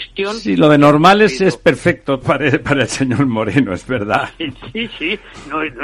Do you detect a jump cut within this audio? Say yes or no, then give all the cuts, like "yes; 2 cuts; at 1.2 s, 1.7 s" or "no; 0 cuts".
yes; 1 cut; at 2.2 s